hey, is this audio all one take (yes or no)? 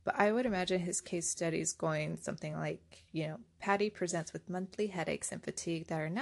yes